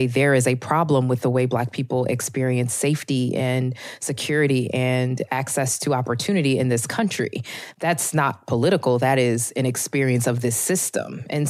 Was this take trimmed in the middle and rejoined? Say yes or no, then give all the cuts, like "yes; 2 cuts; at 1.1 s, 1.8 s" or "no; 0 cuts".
no; 0 cuts